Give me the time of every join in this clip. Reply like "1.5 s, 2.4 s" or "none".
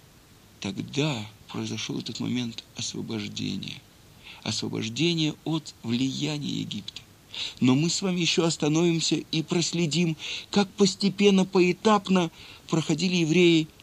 1.4 s, 5.8 s

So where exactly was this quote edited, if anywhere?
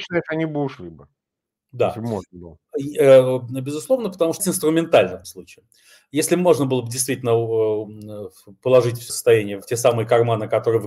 4.4 s, 5.2 s, 9.1 s, 9.6 s

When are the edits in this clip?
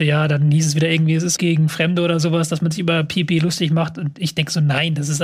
1.4 s

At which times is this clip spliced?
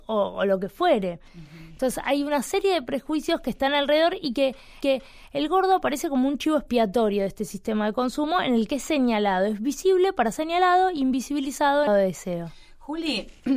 4.8 s, 10.3 s, 11.9 s

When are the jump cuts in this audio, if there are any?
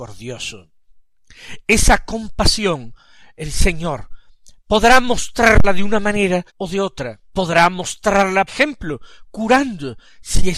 6.5 s, 7.3 s, 8.5 s

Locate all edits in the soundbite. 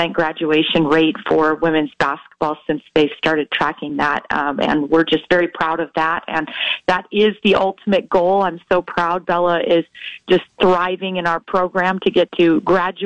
none

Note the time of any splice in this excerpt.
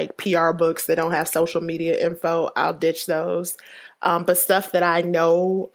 none

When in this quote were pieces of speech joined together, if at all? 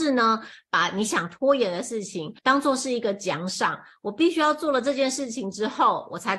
2.4 s

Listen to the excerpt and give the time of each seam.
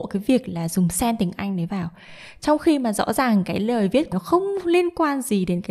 4.1 s

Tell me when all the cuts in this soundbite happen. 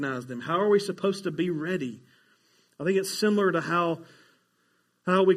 none

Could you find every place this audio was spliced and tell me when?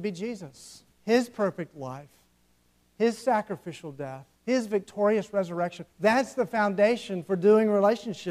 0.9 s, 4.3 s, 5.9 s

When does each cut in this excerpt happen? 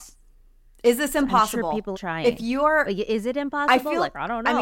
1.9 s

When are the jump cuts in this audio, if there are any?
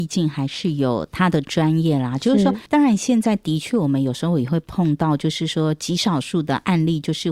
2.7 s

